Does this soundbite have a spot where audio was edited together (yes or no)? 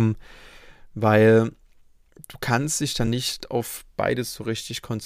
no